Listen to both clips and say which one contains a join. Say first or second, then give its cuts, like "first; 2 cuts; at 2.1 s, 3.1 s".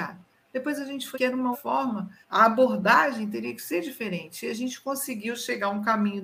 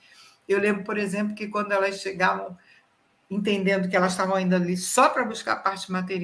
first; 3 cuts; at 1.1 s, 1.5 s, 2.2 s